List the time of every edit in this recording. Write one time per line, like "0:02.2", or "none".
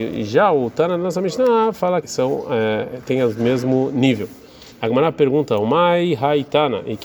0:02.0
0:04.7